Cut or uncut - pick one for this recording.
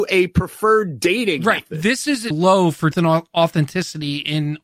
cut